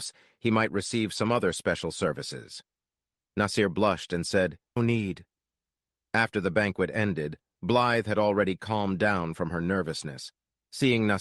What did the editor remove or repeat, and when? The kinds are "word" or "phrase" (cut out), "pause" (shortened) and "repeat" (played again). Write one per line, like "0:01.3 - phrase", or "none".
0:04.8 - word